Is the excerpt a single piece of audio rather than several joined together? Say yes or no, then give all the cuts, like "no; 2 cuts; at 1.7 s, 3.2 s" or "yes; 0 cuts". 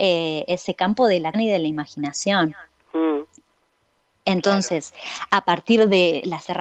no; 1 cut; at 1.3 s